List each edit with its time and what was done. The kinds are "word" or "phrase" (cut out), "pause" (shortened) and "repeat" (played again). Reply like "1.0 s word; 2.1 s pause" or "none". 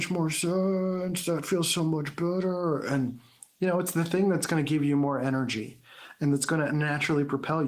none